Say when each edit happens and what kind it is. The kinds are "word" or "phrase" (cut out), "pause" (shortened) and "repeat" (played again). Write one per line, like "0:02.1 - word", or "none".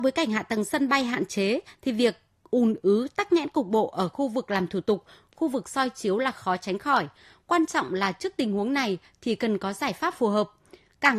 none